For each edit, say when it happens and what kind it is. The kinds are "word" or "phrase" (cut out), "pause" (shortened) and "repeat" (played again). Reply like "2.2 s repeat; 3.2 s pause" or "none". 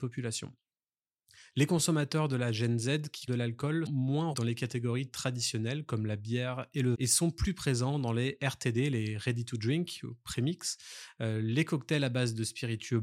3.3 s word; 3.9 s word; 4.3 s word; 6.9 s word